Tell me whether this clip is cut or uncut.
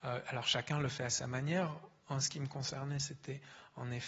uncut